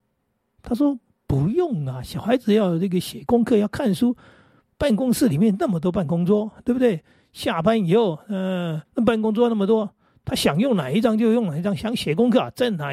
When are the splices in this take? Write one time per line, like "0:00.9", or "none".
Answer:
0:08.8